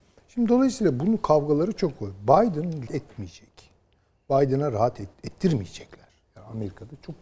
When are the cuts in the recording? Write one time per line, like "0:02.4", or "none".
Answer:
0:02.9
0:05.1